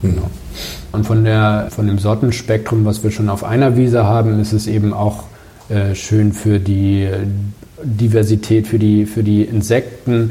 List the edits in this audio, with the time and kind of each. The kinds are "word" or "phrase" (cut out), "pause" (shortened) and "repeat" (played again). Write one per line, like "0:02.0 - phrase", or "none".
none